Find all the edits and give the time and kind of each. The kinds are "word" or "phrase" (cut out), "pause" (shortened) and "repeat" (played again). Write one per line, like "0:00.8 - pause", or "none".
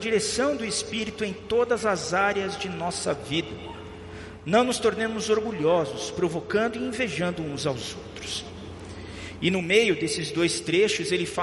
none